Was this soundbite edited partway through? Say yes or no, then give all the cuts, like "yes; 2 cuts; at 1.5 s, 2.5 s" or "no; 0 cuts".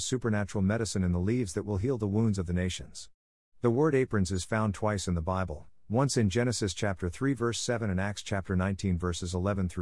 no; 0 cuts